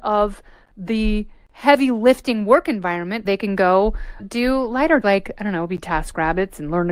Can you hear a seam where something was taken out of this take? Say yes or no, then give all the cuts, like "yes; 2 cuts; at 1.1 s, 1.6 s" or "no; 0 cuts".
yes; 3 cuts; at 3.3 s, 4.2 s, 5.0 s